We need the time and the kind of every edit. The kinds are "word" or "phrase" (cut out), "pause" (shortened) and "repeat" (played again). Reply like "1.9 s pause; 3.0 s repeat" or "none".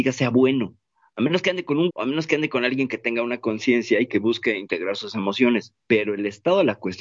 1.9 s word

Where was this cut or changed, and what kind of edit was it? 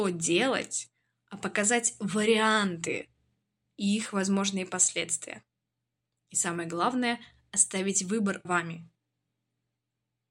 8.4 s word

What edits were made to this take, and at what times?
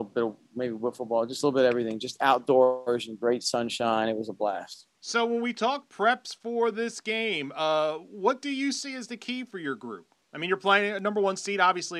none

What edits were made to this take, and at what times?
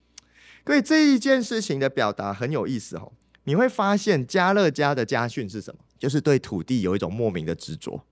3.2 s pause; 5.9 s pause

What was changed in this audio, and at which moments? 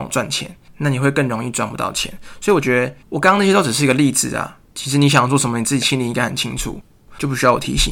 3.0 s pause; 4.7 s pause

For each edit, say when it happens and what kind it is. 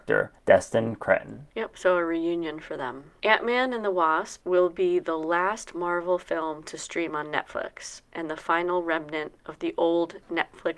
none

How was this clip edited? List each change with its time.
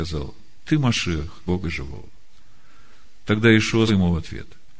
1.5 s word; 3.9 s word

